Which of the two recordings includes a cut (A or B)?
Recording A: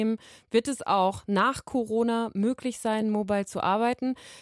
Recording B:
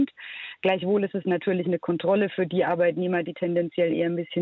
B